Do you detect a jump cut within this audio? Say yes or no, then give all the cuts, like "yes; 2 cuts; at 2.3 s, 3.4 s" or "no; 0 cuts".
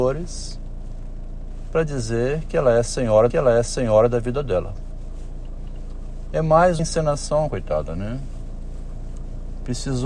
yes; 2 cuts; at 3.3 s, 6.8 s